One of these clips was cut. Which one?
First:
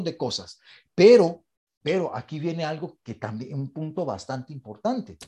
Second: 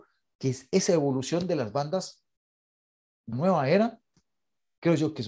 second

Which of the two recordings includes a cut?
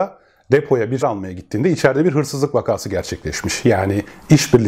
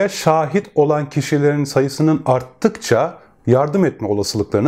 first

